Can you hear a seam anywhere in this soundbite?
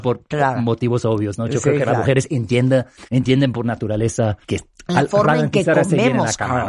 yes; 2 cuts; at 3.1 s, 4.4 s

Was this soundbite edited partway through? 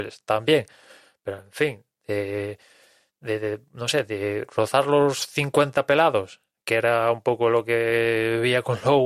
no; 0 cuts

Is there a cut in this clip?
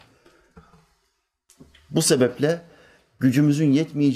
no; 0 cuts

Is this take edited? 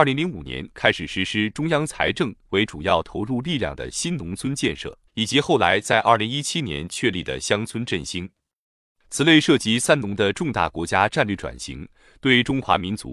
yes; 1 cut; at 5.1 s

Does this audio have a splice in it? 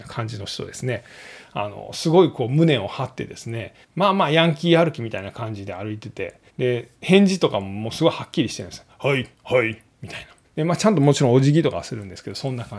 yes; 4 cuts; at 3.8 s, 6.5 s, 9.3 s, 10.4 s

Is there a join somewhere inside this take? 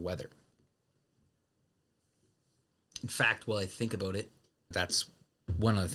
yes; 1 cut; at 4.7 s

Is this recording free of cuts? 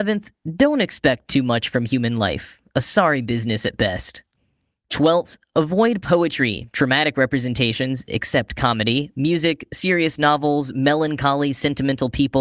yes; 0 cuts

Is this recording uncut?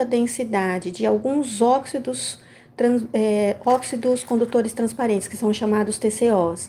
yes; 0 cuts

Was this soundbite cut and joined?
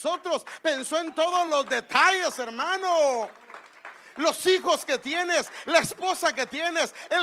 no; 0 cuts

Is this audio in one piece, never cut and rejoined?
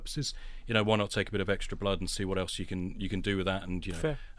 yes; 0 cuts

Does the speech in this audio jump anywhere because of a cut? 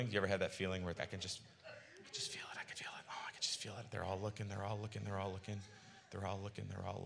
yes; 2 cuts; at 1.0 s, 2.7 s

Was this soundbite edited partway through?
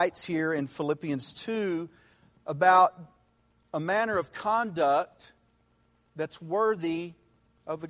no; 0 cuts

